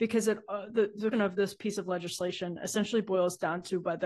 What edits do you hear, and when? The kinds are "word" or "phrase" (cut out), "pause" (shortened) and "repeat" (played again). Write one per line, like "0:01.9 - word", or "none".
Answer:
0:01.1 - word